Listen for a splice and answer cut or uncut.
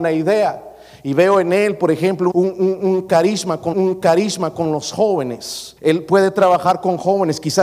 cut